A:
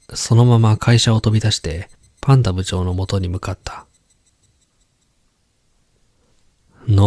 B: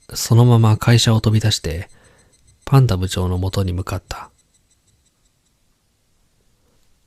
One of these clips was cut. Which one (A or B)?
A